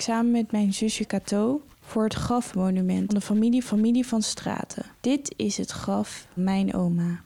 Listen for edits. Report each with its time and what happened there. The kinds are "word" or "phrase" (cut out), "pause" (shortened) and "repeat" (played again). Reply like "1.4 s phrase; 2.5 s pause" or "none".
1.7 s pause; 3.1 s word; 3.6 s repeat; 5.0 s pause; 6.4 s word

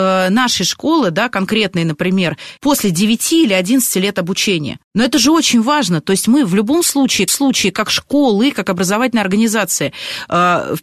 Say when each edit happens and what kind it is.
2.6 s pause; 4.8 s pause; 7.3 s repeat

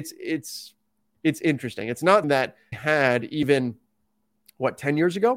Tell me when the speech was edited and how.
2.2 s word; 2.7 s word

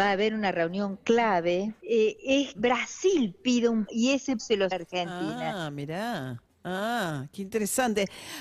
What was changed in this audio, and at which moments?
1.8 s pause; 2.5 s word; 3.9 s word; 4.4 s word; 4.7 s phrase

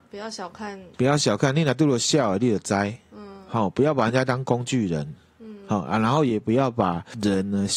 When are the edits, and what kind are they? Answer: none

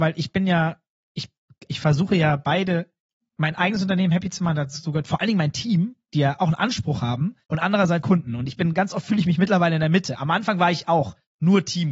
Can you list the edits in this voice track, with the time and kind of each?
1.7 s word; 7.4 s pause; 8.0 s word

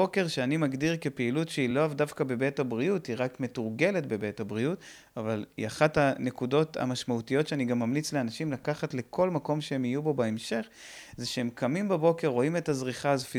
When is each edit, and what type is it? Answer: none

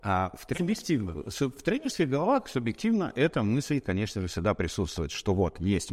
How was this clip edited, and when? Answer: none

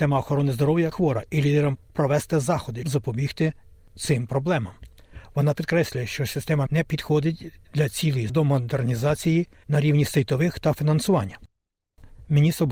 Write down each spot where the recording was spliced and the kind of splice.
0.9 s word; 1.8 s word; 2.8 s word; 5.6 s word; 6.7 s word; 8.3 s word; 9.6 s word; 10.8 s word

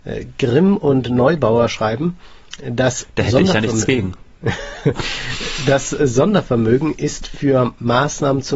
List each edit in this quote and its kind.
none

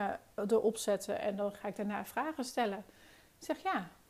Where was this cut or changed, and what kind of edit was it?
none

